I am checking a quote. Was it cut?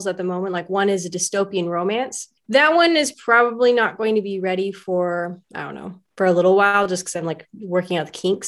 yes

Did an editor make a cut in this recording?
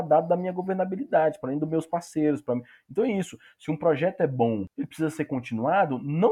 no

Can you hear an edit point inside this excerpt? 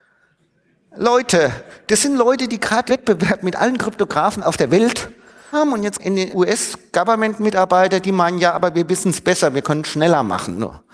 yes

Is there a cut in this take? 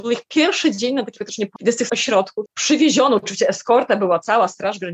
yes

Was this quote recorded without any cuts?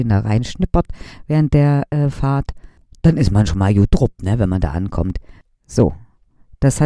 yes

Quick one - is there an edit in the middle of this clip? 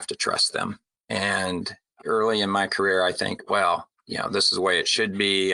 no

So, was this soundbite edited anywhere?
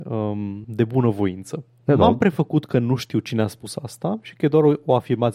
no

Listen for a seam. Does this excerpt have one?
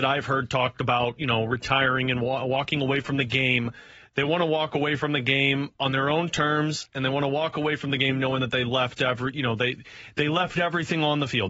no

